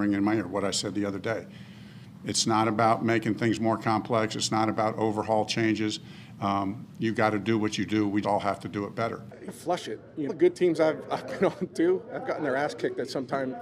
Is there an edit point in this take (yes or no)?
yes